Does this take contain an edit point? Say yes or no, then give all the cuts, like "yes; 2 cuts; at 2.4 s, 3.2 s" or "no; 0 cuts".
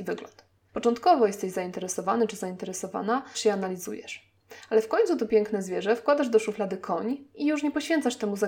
yes; 1 cut; at 3.3 s